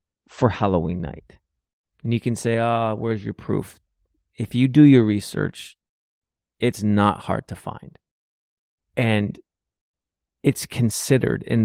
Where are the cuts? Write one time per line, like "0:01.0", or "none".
none